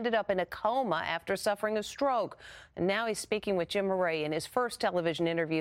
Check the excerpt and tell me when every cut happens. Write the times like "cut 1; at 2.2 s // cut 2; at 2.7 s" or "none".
none